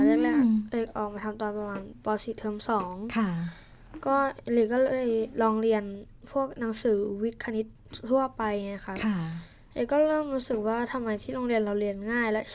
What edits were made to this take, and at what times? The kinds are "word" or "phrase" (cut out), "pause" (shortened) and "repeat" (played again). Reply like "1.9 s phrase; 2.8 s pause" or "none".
none